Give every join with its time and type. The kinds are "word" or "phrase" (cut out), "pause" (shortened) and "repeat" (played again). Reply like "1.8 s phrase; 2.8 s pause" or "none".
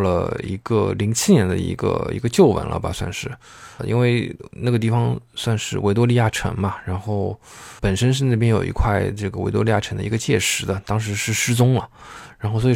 3.8 s word; 7.8 s word